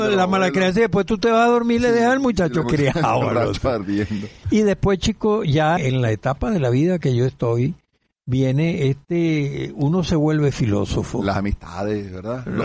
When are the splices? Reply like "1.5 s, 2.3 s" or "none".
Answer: 2.6 s, 5.8 s

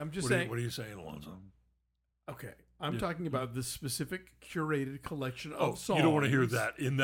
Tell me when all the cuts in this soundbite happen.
none

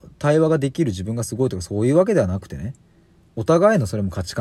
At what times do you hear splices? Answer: none

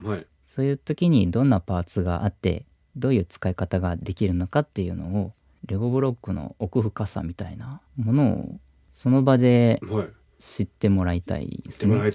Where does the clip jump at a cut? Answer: 7.9 s

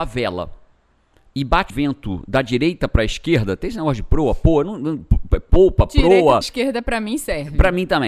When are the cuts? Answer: 1.7 s, 6.4 s

